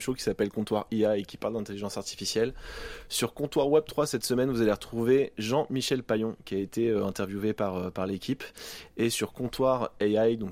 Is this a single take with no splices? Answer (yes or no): yes